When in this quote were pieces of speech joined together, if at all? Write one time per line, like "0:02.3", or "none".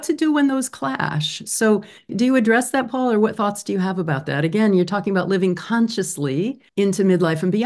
0:02.1
0:06.7